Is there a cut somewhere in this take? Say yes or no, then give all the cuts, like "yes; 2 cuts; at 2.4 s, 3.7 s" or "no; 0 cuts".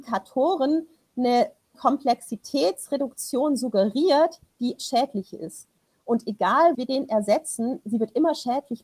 yes; 3 cuts; at 1.7 s, 4.8 s, 6.7 s